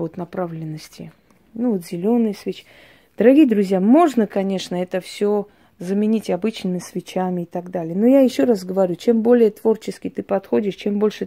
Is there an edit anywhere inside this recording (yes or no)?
no